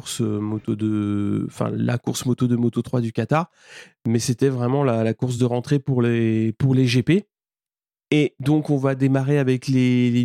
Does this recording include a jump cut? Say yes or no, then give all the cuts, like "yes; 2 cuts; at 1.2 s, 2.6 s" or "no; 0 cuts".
no; 0 cuts